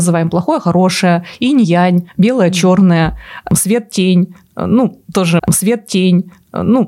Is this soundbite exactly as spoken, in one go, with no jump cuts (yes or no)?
no